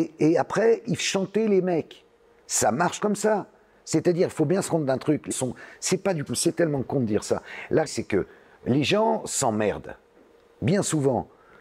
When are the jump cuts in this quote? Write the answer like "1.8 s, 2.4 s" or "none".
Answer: 1.0 s, 3.0 s, 4.7 s, 5.3 s, 6.3 s, 7.9 s